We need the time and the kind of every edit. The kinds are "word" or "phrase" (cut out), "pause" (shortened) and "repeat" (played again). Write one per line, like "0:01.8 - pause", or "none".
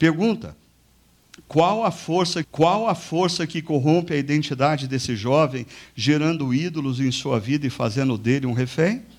0:02.4 - repeat